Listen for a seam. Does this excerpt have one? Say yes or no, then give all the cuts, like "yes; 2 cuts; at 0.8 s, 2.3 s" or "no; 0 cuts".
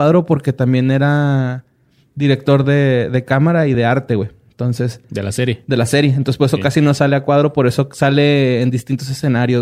no; 0 cuts